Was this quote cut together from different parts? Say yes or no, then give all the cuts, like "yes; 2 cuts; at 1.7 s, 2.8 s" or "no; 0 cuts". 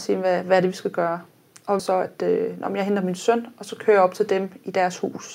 yes; 1 cut; at 1.8 s